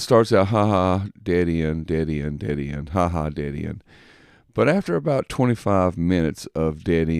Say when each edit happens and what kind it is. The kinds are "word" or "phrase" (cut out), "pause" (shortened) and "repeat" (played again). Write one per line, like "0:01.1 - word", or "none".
none